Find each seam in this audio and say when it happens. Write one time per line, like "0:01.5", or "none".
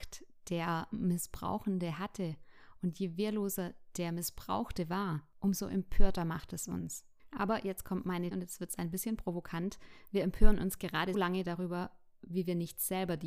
0:08.3
0:11.1

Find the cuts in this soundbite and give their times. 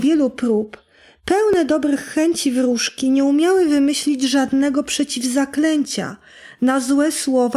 none

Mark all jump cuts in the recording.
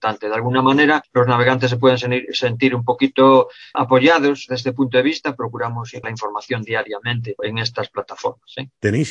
0:04.5
0:06.0
0:07.4

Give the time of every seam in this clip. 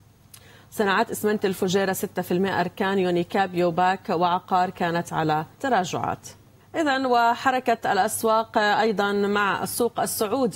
0:05.5

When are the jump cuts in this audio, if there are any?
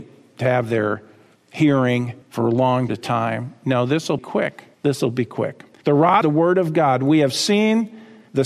0:02.2
0:02.9
0:04.2
0:04.7
0:05.7
0:06.2

